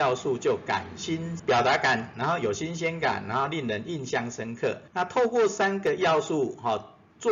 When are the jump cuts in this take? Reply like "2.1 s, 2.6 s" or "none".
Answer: 1.4 s, 2.1 s, 4.9 s